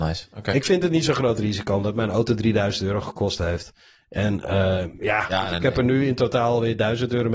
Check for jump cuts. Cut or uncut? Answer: uncut